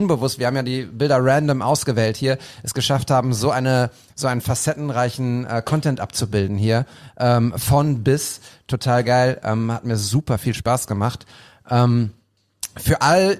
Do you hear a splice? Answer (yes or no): no